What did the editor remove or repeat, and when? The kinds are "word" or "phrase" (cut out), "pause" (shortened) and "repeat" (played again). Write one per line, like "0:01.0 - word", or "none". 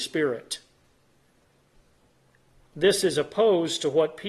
none